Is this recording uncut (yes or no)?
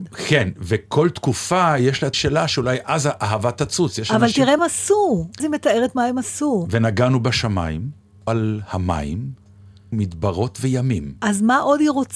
no